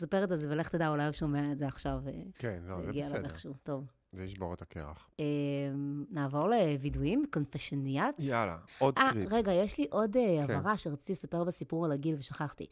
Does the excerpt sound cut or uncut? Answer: cut